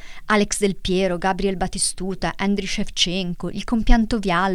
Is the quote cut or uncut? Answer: uncut